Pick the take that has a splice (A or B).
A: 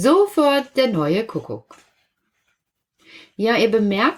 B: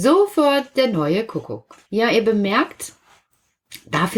B